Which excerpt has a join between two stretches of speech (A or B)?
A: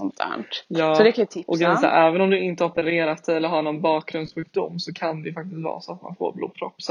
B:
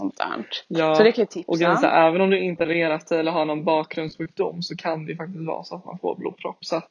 B